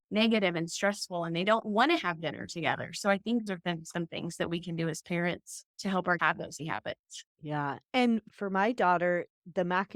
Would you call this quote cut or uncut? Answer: cut